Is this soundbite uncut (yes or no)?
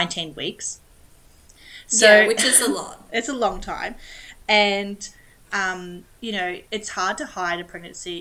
no